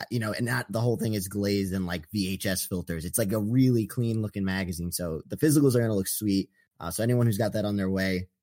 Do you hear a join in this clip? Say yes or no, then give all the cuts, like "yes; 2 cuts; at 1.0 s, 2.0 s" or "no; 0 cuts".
no; 0 cuts